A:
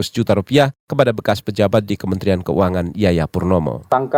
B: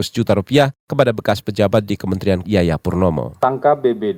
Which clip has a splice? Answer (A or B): B